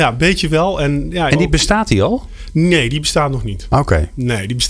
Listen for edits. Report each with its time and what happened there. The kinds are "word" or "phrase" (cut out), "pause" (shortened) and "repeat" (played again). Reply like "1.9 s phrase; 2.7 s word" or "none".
1.3 s phrase